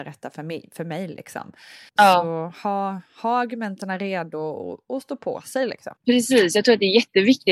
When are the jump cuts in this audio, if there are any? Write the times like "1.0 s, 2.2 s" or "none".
1.9 s, 6.0 s